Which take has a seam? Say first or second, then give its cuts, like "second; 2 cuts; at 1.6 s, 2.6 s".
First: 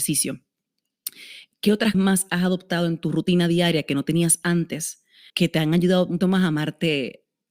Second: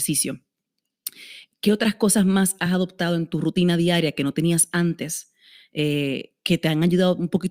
first; 3 cuts; at 1.9 s, 5.3 s, 6.2 s